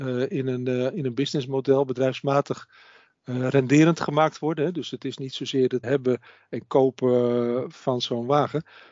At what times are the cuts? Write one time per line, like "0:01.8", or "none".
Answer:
0:05.8